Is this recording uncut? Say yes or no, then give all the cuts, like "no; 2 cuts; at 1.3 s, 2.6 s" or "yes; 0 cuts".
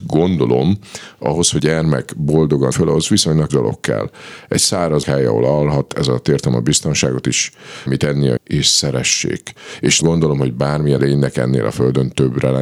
no; 8 cuts; at 1.6 s, 2.7 s, 3.5 s, 5.0 s, 7.9 s, 8.4 s, 10.0 s, 11.0 s